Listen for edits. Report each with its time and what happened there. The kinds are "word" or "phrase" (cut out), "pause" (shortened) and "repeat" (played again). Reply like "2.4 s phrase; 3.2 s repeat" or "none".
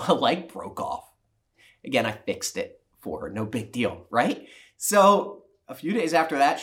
none

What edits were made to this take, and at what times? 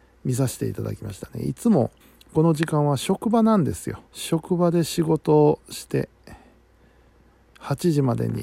2.0 s pause; 4.1 s pause

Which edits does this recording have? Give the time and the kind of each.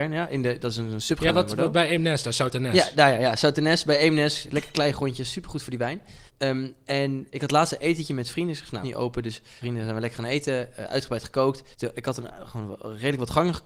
1.3 s word; 6.3 s pause; 7.3 s word; 8.8 s phrase; 9.6 s phrase; 11.7 s pause

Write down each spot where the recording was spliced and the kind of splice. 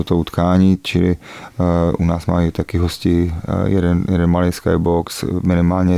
none

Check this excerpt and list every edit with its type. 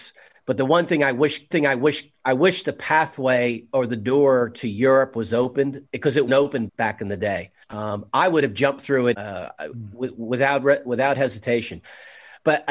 1.5 s repeat; 6.3 s word; 6.7 s word; 7.6 s pause; 9.1 s word

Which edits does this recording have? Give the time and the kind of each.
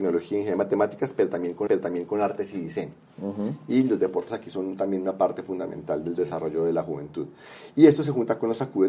1.7 s repeat

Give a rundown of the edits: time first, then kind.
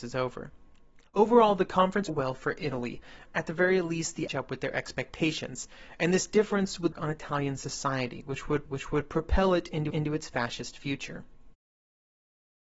1.1 s pause; 2.1 s phrase; 3.2 s word; 4.3 s phrase; 6.9 s phrase; 8.6 s repeat; 9.9 s repeat

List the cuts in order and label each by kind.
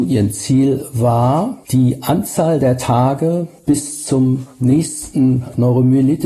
1.6 s pause

